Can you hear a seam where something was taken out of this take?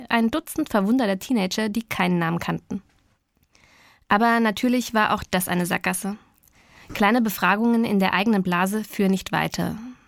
no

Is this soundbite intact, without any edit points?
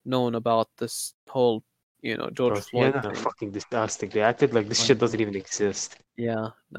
yes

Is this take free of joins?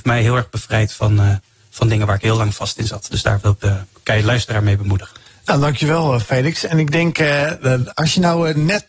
yes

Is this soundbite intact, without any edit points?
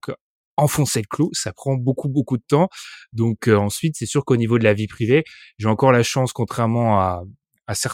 yes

